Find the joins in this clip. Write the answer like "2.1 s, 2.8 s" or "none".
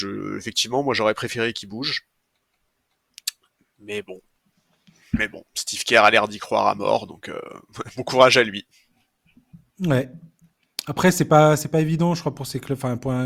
none